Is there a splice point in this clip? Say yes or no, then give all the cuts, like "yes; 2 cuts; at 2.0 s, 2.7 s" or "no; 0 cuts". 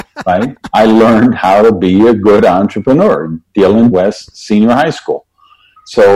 yes; 1 cut; at 3.9 s